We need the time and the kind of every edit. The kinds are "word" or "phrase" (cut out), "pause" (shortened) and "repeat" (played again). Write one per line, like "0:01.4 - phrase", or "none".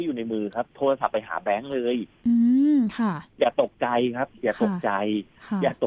0:03.3 - pause